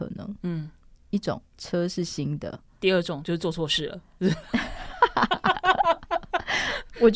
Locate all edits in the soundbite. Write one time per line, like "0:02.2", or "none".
0:01.5